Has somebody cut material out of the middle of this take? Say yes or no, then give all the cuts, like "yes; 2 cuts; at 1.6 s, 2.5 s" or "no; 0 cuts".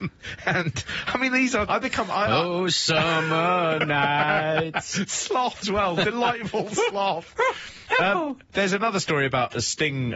yes; 2 cuts; at 1.7 s, 5.6 s